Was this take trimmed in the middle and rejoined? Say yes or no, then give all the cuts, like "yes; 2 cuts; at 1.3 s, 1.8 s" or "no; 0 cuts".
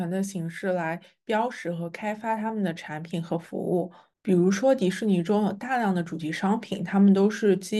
no; 0 cuts